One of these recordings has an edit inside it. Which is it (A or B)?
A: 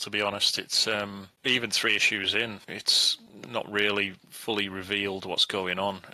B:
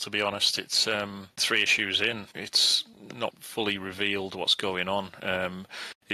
B